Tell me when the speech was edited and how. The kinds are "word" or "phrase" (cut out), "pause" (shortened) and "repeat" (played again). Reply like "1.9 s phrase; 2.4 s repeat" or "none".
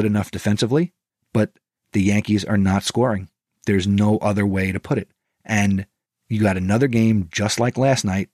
none